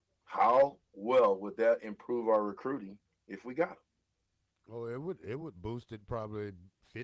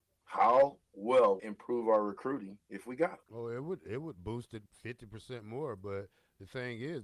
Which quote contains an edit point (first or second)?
second